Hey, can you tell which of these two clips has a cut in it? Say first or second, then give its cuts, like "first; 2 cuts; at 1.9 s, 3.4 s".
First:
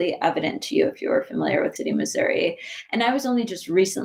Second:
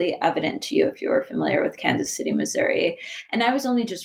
first; 1 cut; at 1.8 s